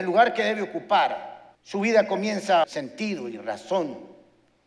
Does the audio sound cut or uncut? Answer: cut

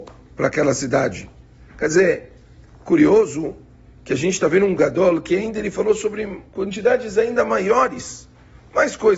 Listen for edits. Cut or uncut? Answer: uncut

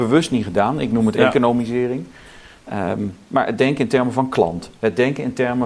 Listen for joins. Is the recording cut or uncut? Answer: uncut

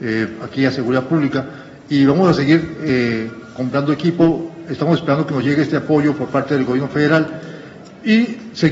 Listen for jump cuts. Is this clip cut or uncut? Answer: uncut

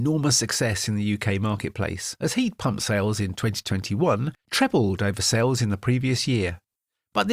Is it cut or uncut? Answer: cut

